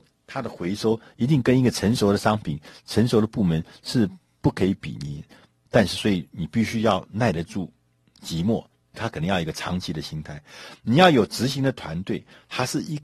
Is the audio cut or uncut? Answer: uncut